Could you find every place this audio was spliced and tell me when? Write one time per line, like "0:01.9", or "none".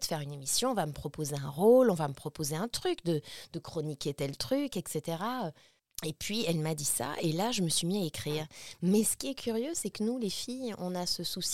0:05.8